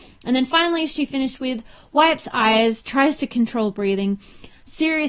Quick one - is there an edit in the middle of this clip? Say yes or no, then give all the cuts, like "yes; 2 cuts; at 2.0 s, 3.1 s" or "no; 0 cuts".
no; 0 cuts